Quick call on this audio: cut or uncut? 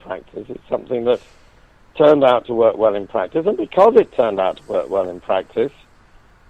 uncut